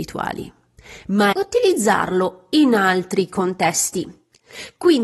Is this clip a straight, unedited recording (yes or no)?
no